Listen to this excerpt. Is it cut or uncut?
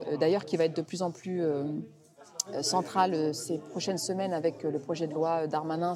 uncut